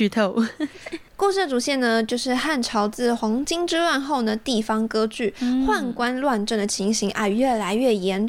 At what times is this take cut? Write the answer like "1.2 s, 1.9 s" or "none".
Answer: none

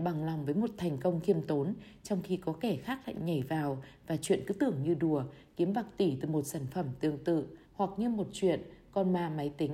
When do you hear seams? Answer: 7.6 s

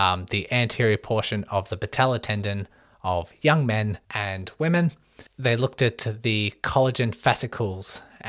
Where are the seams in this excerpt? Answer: 4.0 s, 5.3 s

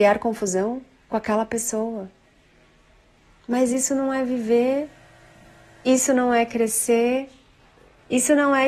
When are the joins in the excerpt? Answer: none

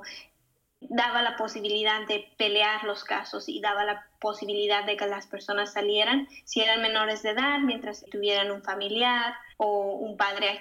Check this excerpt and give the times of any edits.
9.5 s

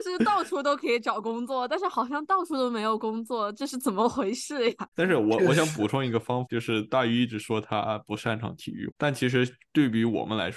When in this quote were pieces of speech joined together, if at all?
6.5 s

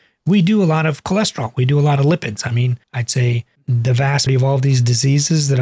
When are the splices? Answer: 2.8 s, 3.6 s, 4.3 s

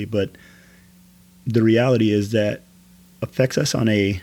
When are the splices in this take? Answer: none

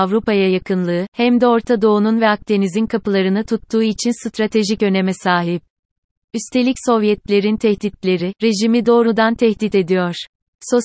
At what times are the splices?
none

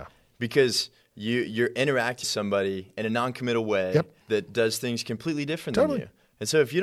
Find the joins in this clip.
2.2 s, 4.2 s

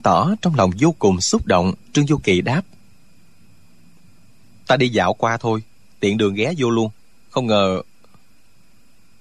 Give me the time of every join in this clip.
1.8 s

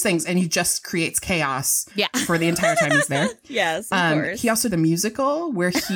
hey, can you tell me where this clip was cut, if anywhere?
1.9 s, 4.7 s

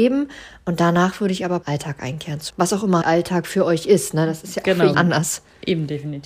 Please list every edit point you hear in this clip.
1.6 s, 2.5 s, 3.0 s, 4.9 s

